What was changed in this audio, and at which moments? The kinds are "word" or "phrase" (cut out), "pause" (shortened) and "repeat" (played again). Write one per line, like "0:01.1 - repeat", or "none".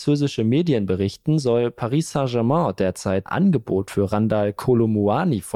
0:03.3 - phrase